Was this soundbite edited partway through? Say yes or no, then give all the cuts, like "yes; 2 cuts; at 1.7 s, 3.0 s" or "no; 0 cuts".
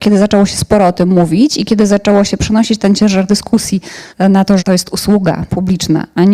yes; 2 cuts; at 4.1 s, 4.6 s